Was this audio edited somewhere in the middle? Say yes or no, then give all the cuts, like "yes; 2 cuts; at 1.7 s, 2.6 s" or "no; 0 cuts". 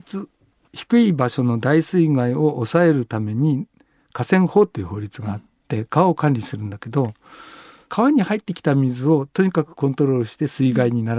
no; 0 cuts